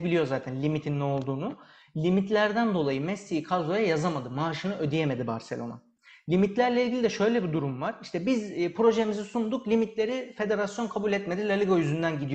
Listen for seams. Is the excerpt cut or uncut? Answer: uncut